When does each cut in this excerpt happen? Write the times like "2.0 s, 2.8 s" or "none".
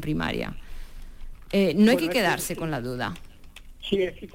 none